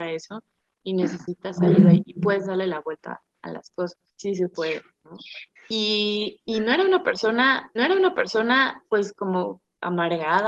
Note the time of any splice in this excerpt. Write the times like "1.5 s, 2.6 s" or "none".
4.1 s, 5.6 s, 7.8 s